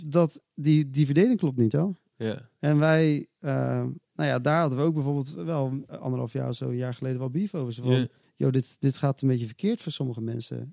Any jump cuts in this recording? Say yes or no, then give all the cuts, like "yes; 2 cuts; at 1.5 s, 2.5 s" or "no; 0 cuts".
yes; 5 cuts; at 1.7 s, 2.5 s, 4.1 s, 5.9 s, 8.2 s